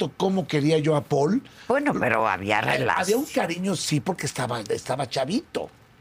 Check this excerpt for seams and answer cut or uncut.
uncut